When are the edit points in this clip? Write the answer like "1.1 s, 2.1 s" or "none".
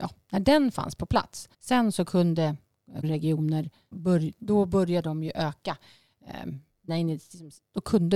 1.5 s, 3.0 s, 3.9 s, 6.9 s

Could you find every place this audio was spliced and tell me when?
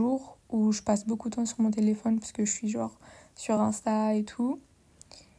none

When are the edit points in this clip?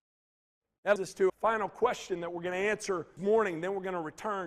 1.0 s, 1.3 s, 3.2 s

